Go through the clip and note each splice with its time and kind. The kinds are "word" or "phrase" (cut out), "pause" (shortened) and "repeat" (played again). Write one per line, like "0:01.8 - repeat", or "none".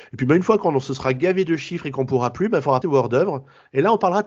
0:02.8 - word